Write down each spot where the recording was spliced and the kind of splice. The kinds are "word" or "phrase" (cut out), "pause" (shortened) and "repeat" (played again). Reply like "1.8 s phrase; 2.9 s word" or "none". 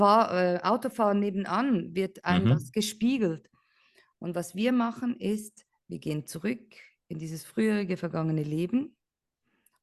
none